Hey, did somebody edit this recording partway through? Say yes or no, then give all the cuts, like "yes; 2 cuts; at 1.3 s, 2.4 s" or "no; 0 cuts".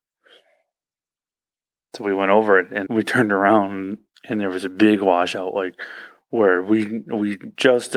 yes; 1 cut; at 2.9 s